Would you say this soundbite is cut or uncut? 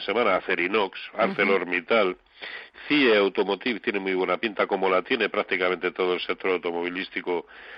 uncut